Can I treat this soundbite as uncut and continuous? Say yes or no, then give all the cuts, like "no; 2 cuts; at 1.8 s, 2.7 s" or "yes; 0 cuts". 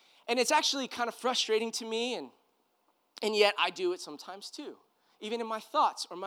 yes; 0 cuts